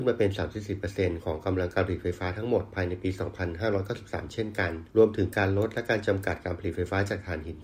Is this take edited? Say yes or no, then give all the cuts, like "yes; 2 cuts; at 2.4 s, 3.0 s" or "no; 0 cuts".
yes; 1 cut; at 4.9 s